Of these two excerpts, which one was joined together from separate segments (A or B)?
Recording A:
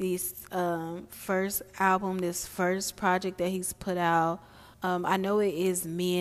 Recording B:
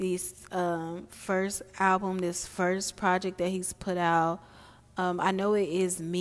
A